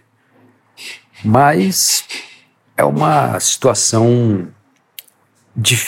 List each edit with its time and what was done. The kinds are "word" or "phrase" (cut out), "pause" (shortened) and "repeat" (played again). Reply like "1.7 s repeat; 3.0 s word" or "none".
none